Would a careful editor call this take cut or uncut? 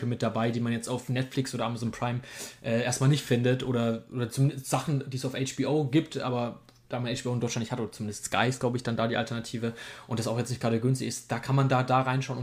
uncut